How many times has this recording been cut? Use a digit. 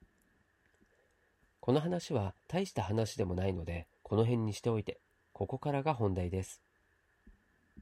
3